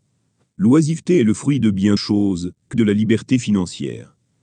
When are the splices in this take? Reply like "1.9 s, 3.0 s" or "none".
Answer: 2.0 s, 2.7 s